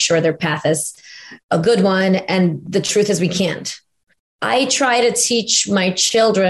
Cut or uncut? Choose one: cut